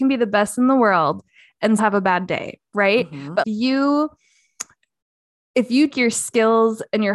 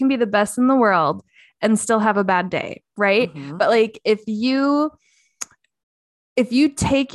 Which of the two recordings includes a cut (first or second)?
first